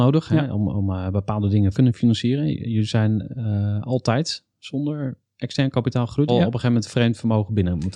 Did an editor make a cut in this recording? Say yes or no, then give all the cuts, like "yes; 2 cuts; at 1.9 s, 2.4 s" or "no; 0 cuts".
yes; 2 cuts; at 1.7 s, 6.3 s